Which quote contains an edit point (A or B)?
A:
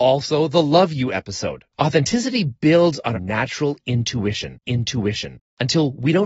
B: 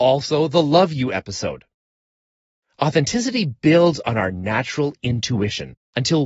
A